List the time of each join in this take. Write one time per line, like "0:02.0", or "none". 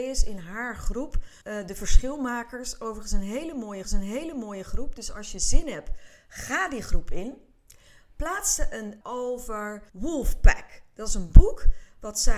0:01.4
0:03.8
0:09.0
0:09.9

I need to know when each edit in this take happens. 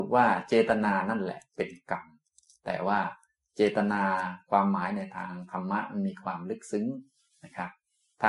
none

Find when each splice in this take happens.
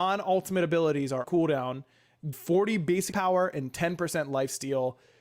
0:01.2
0:02.3
0:03.1

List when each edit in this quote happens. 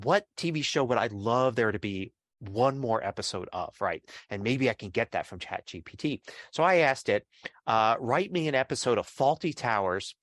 none

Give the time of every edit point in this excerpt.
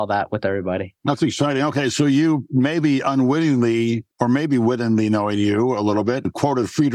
none

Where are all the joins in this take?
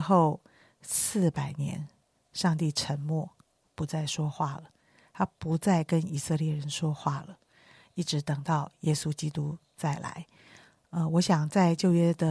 none

